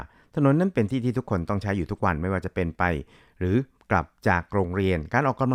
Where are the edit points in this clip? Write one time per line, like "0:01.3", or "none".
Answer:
none